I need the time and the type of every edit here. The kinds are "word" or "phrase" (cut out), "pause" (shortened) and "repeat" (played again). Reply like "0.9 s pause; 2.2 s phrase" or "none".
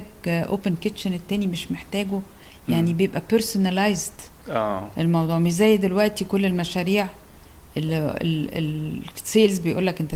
none